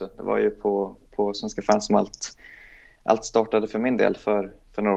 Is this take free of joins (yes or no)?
yes